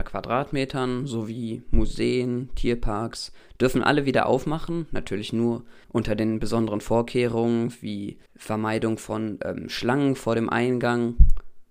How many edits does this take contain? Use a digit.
2